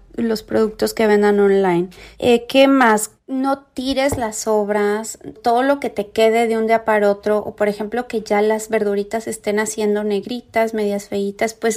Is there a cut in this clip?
yes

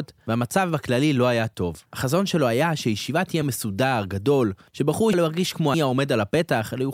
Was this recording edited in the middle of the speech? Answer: yes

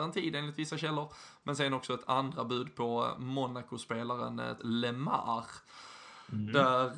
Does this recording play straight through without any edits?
no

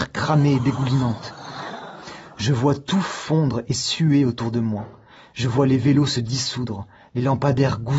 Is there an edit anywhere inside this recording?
no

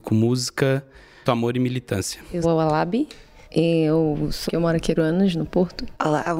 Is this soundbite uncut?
no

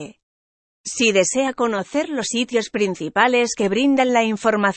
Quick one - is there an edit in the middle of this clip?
no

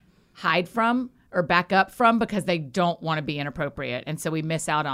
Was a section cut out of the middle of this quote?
no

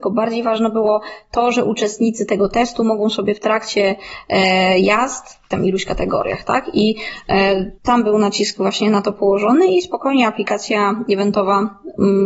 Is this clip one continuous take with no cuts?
no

